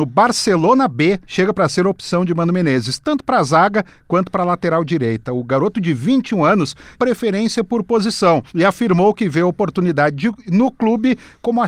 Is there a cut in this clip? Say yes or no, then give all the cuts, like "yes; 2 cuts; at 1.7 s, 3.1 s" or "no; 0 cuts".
yes; 3 cuts; at 1.2 s, 6.9 s, 8.5 s